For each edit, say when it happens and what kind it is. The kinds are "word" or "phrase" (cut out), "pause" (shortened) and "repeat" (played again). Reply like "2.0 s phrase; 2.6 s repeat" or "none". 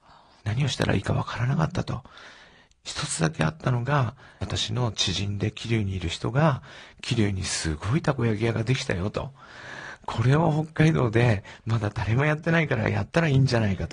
none